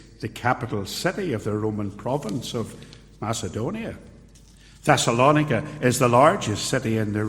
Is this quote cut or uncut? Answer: uncut